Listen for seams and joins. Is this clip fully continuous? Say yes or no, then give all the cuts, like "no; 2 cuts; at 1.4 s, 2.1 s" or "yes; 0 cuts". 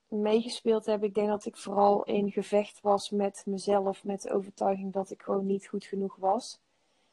yes; 0 cuts